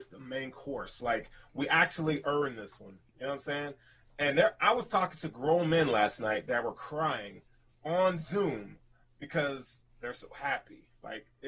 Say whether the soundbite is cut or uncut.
cut